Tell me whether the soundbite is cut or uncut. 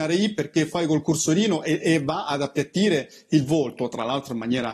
uncut